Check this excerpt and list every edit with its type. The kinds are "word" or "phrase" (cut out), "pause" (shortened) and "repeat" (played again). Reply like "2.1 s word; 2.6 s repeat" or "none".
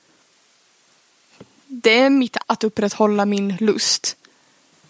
2.4 s word